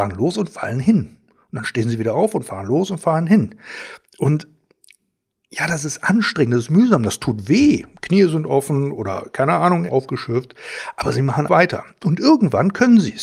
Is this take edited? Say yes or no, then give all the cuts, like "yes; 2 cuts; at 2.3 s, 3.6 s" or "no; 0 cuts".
yes; 3 cuts; at 4.1 s, 9.9 s, 11.5 s